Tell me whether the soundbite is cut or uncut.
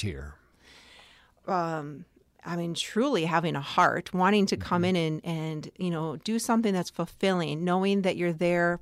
uncut